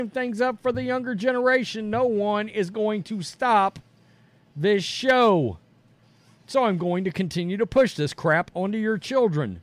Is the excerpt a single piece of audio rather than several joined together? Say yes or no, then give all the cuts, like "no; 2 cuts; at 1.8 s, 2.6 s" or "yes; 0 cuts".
yes; 0 cuts